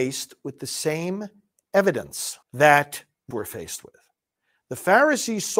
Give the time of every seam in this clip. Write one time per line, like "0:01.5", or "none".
0:02.4
0:03.3